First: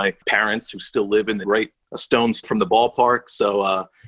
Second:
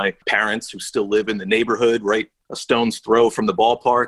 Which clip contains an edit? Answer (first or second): first